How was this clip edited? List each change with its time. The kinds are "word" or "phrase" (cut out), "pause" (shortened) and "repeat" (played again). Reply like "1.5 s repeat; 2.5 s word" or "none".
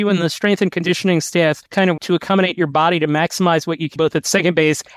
1.7 s pause; 2.0 s word; 4.0 s word